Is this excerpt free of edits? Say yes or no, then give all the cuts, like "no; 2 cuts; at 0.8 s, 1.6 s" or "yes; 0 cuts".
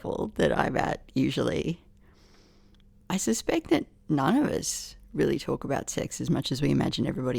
yes; 0 cuts